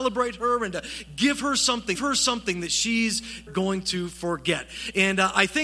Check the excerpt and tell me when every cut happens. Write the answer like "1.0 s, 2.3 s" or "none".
1.9 s, 3.5 s